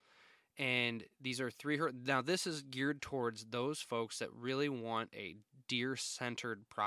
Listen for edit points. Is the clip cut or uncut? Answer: uncut